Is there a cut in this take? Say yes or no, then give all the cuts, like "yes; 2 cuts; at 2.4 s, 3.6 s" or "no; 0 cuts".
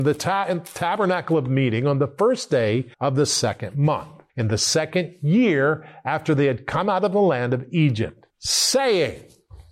yes; 3 cuts; at 2.9 s, 4.3 s, 8.3 s